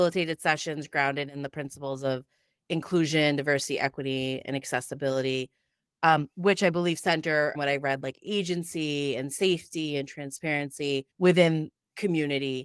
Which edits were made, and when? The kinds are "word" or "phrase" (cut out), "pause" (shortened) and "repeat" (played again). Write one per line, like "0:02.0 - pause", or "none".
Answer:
0:07.5 - phrase
0:11.1 - pause